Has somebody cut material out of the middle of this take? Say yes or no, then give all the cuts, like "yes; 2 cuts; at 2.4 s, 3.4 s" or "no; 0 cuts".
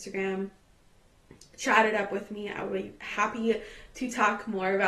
no; 0 cuts